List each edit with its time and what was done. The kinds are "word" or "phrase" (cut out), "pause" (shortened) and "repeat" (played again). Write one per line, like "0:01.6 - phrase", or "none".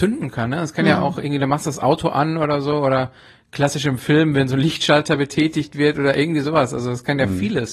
none